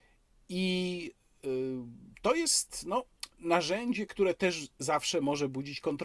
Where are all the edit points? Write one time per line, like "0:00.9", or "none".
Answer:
none